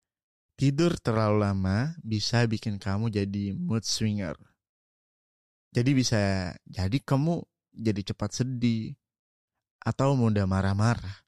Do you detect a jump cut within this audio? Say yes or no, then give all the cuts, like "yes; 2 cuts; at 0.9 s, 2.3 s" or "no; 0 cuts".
no; 0 cuts